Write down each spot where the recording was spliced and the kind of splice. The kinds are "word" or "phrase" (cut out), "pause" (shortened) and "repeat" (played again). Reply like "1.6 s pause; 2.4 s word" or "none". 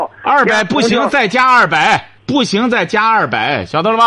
2.2 s pause